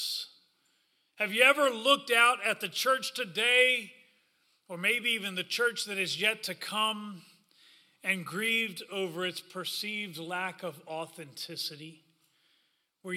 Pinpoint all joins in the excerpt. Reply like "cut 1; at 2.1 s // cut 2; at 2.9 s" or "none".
none